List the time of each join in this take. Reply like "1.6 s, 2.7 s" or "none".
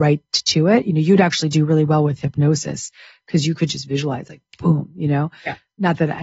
none